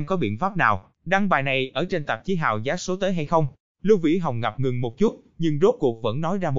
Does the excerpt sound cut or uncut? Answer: cut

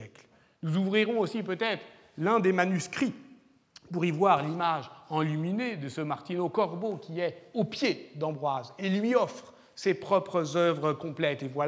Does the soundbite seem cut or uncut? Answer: uncut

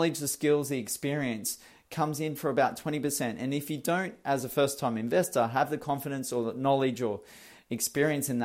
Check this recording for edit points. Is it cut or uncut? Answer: uncut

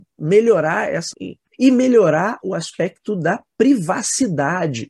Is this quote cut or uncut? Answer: cut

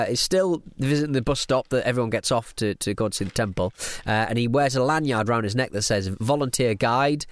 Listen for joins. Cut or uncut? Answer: uncut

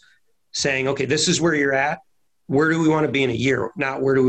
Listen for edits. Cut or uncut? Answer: uncut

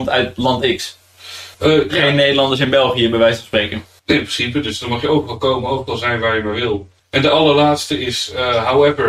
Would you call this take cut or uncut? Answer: cut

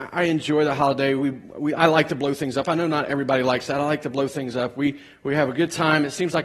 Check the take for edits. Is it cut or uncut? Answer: uncut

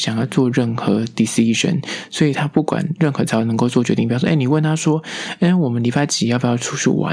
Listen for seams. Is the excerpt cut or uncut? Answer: uncut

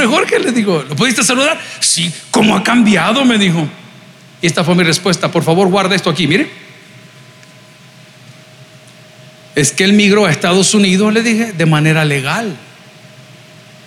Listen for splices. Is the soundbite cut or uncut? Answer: uncut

